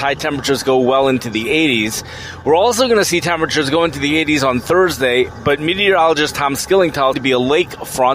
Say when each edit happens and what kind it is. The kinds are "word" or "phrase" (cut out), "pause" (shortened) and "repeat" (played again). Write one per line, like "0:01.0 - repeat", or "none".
0:07.1 - phrase